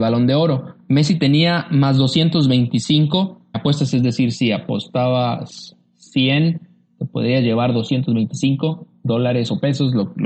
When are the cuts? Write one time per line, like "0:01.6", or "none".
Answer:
0:03.5